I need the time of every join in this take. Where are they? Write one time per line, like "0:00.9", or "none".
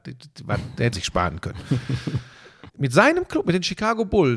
0:00.9
0:02.7